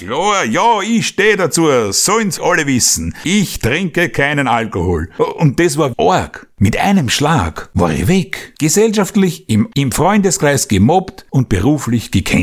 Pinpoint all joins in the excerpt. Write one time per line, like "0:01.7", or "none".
0:02.4
0:05.9
0:09.7